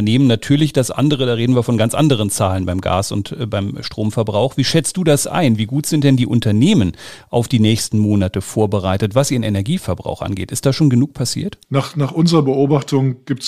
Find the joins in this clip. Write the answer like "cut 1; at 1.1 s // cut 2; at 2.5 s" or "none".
none